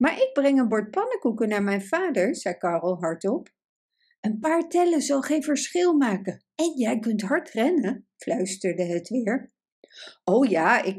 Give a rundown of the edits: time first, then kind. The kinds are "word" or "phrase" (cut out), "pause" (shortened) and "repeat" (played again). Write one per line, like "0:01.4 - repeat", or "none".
none